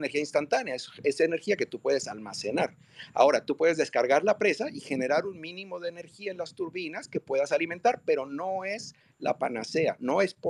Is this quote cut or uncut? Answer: uncut